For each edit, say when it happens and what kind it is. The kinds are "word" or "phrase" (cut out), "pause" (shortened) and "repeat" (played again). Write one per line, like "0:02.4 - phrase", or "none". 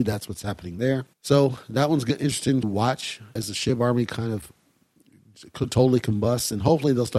0:01.1 - pause
0:02.6 - word
0:03.4 - word